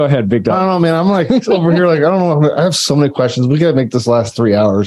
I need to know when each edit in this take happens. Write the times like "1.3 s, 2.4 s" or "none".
none